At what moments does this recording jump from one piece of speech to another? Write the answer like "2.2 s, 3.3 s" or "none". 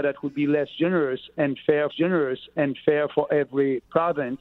1.9 s